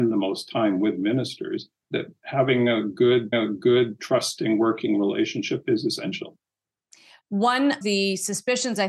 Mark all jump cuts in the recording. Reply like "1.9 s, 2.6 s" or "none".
1.8 s, 3.3 s, 5.6 s, 7.8 s